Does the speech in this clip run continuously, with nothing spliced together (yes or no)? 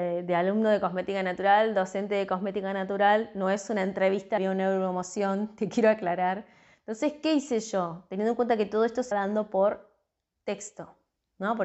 no